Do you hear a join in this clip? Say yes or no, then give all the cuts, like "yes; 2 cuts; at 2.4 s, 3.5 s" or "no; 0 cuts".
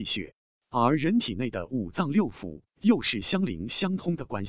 no; 0 cuts